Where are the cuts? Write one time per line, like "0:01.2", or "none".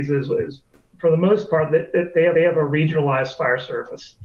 0:02.3